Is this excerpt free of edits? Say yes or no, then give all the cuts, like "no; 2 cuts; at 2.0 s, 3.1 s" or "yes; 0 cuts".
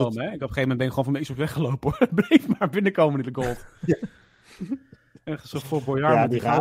yes; 0 cuts